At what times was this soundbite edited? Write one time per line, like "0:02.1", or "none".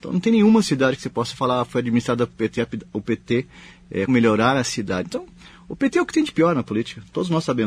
0:04.1